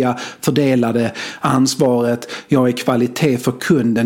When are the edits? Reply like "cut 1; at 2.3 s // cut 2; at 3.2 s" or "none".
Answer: none